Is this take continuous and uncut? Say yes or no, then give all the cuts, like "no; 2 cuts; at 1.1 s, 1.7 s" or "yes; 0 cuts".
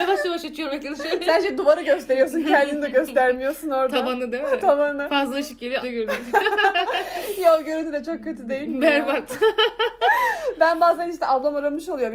no; 1 cut; at 5.8 s